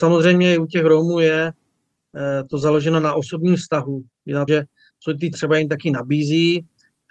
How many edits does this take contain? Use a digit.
2